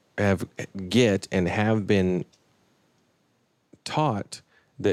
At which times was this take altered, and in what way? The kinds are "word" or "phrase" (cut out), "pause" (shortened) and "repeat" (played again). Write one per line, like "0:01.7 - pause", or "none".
none